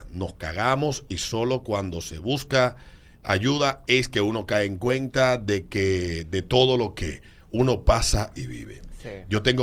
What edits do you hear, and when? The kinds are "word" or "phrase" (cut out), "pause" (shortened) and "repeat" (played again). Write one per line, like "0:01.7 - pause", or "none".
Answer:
none